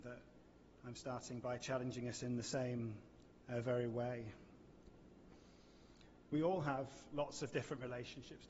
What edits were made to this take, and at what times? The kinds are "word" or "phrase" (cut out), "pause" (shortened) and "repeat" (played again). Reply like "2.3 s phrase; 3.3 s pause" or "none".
6.2 s pause